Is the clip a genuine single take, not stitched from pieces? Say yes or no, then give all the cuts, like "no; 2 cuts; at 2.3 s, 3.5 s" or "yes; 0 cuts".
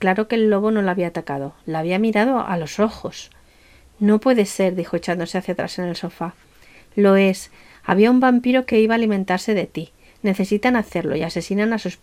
yes; 0 cuts